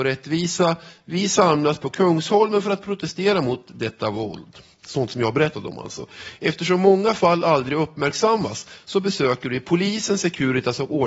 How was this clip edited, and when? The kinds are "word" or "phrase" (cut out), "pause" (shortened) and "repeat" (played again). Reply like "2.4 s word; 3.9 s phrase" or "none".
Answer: none